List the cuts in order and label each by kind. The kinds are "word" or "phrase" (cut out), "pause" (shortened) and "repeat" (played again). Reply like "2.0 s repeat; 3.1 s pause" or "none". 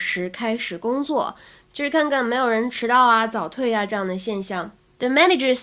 none